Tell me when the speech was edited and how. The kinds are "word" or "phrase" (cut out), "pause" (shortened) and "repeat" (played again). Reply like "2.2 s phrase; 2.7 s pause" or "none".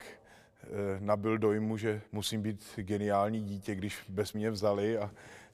2.1 s pause; 4.3 s word